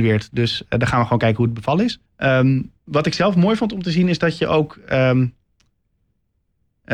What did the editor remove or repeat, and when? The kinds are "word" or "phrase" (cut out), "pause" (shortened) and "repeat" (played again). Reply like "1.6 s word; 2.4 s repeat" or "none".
2.1 s pause